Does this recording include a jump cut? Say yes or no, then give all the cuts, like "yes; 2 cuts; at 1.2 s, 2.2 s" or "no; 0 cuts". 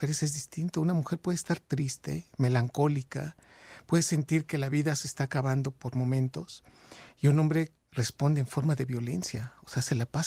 yes; 1 cut; at 7.8 s